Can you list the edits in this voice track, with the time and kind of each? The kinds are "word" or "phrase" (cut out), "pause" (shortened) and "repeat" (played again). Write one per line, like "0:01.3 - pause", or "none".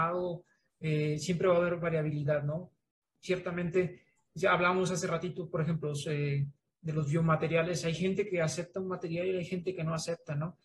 0:05.8 - word